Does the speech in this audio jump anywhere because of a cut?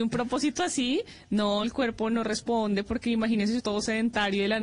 yes; 2 cuts; at 1.6 s, 3.6 s

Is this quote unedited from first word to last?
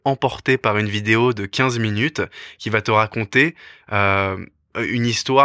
yes; 0 cuts

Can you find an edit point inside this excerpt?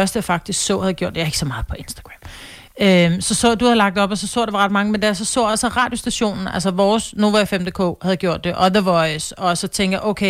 no; 0 cuts

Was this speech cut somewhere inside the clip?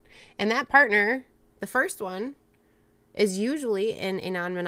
no; 0 cuts

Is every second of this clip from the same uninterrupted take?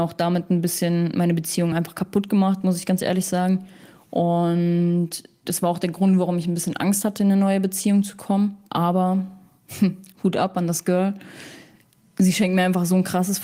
yes; 0 cuts

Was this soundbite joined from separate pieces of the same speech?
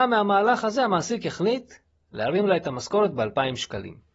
no; 0 cuts

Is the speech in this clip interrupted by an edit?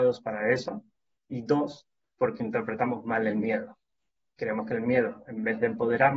no; 0 cuts

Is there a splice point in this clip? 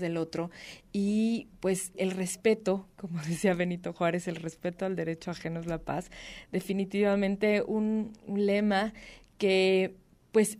yes; 1 cut; at 1.9 s

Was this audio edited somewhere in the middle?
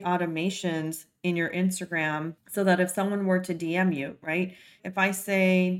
no; 0 cuts

